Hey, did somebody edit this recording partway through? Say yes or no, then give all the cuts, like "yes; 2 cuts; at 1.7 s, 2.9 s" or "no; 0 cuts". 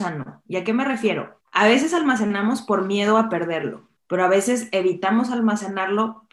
yes; 2 cuts; at 1.4 s, 4.0 s